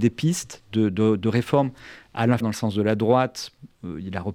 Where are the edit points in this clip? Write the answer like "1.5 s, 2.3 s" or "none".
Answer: 2.4 s